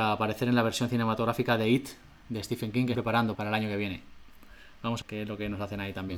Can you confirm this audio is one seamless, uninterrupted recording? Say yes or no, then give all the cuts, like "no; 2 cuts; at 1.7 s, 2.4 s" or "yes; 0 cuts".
no; 3 cuts; at 2.9 s, 3.3 s, 5.0 s